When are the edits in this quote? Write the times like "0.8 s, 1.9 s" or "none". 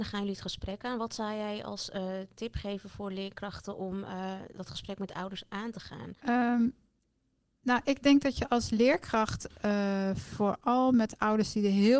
6.2 s